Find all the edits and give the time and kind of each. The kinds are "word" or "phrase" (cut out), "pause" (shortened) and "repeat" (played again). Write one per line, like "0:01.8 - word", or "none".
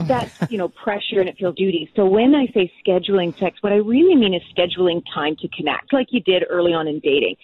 0:01.5 - word
0:05.9 - word